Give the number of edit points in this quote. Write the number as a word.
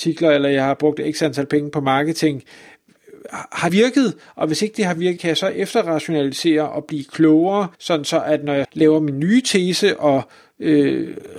four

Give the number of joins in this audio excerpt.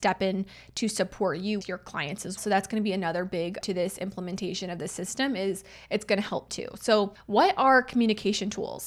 four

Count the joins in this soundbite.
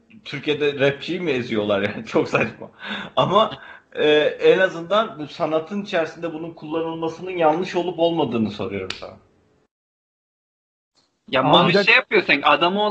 zero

